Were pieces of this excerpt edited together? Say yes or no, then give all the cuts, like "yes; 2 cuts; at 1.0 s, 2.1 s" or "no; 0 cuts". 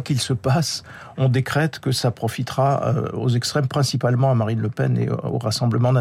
no; 0 cuts